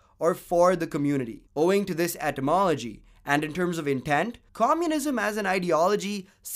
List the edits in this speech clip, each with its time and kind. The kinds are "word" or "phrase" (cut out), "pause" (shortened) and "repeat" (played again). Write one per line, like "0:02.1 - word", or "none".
0:01.5 - pause
0:04.5 - pause